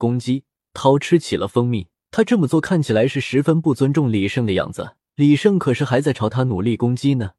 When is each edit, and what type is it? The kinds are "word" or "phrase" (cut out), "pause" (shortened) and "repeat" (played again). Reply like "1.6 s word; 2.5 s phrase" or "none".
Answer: 1.9 s pause; 5.1 s pause